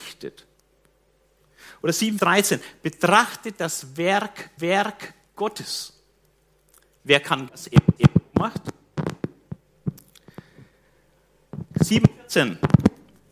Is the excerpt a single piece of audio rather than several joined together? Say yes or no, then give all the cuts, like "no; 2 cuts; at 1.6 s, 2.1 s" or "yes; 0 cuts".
no; 4 cuts; at 2.2 s, 4.6 s, 7.5 s, 8.0 s